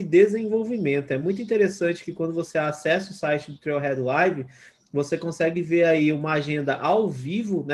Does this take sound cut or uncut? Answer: uncut